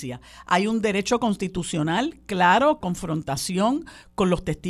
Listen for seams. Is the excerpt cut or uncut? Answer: cut